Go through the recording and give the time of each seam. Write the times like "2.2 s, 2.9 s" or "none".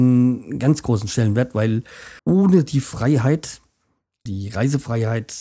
2.2 s, 4.3 s